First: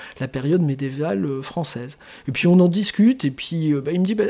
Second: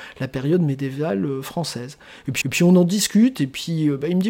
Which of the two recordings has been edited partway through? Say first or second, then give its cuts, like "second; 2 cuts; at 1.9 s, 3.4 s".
second; 1 cut; at 2.4 s